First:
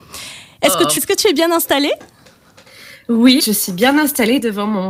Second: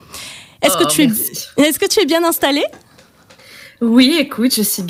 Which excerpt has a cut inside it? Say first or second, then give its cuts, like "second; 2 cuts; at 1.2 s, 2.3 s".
first; 2 cuts; at 1.0 s, 3.4 s